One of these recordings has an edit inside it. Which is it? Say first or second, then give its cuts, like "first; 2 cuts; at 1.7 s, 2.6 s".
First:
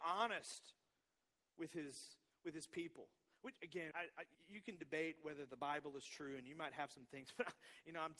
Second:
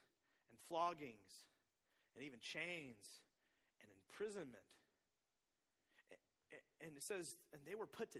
first; 3 cuts; at 3.6 s, 3.9 s, 4.3 s